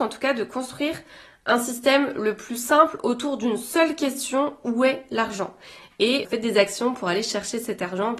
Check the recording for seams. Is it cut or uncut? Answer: cut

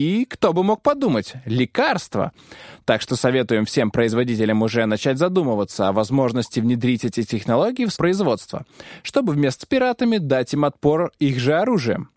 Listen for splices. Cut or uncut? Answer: cut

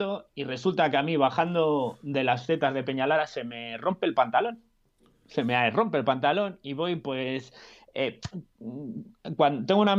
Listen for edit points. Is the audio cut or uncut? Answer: uncut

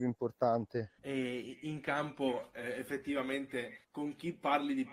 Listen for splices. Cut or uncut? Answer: cut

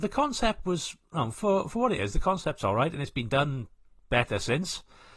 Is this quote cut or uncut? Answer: uncut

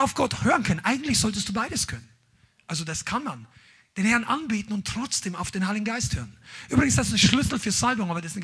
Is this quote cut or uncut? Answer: uncut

